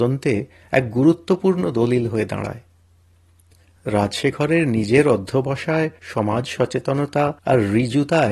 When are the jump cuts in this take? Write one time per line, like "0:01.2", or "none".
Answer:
0:06.0
0:07.4